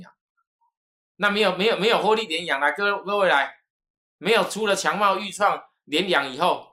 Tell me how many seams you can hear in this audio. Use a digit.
0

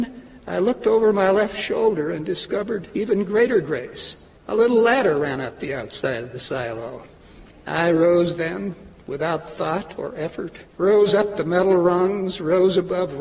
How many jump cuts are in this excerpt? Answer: 3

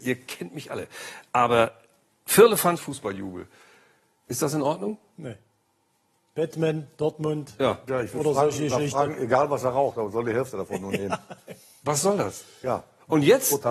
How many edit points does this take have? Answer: 1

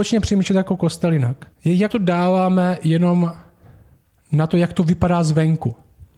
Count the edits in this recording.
2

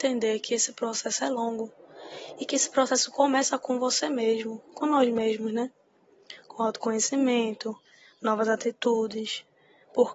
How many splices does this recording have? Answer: 0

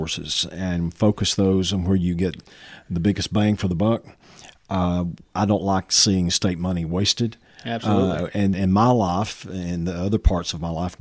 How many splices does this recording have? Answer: 1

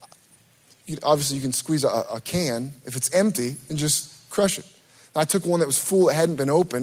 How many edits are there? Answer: 0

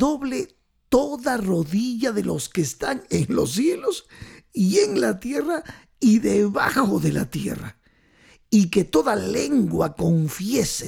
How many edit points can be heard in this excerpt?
0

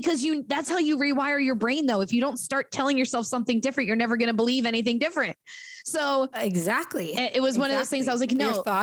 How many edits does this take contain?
0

